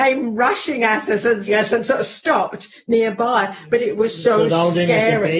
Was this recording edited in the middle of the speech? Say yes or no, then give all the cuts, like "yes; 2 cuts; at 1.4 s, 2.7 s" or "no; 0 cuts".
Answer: yes; 1 cut; at 1.5 s